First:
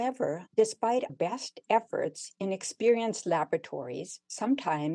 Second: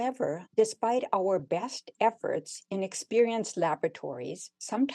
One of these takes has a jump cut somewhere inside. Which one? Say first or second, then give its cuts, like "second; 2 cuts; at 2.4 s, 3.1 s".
first; 1 cut; at 1.1 s